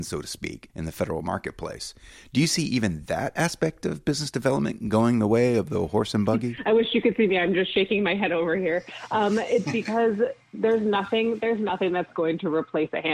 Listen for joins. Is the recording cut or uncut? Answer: uncut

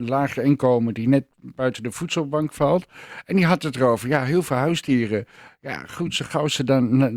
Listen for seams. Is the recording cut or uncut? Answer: uncut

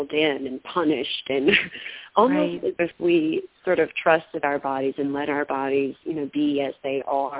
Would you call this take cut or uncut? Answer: cut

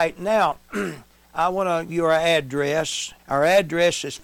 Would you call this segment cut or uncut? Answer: cut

